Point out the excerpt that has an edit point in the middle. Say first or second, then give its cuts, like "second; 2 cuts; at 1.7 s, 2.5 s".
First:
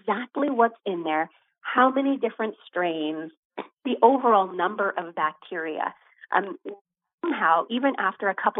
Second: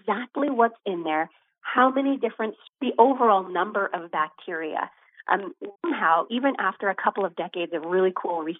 second; 2 cuts; at 2.7 s, 5.8 s